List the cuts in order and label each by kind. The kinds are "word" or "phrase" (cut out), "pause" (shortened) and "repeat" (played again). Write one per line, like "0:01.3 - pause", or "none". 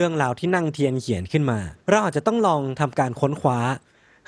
0:01.8 - pause